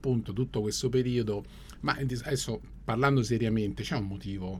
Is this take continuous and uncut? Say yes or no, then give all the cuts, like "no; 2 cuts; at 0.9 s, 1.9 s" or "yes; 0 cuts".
yes; 0 cuts